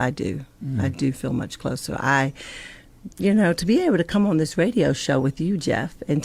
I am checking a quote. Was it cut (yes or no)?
yes